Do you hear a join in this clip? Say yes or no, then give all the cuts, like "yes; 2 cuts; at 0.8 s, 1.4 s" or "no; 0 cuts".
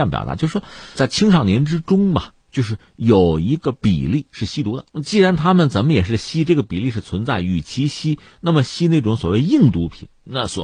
yes; 3 cuts; at 1.0 s, 2.4 s, 4.9 s